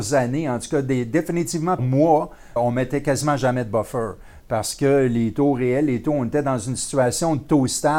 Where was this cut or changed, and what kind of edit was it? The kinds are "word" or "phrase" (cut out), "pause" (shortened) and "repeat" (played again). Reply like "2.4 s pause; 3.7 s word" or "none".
1.8 s word; 2.6 s word